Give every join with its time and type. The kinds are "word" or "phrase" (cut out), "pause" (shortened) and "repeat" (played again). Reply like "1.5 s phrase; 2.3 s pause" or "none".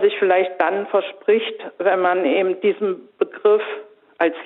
none